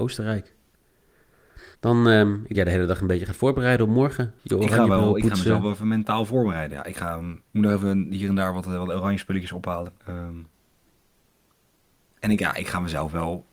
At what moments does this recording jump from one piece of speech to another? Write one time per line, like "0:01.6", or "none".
0:01.7
0:02.5
0:04.4
0:07.5
0:10.0